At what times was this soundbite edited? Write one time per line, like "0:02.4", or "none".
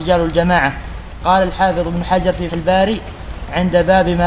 0:02.5